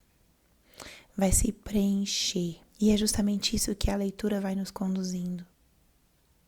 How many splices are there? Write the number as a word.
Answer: one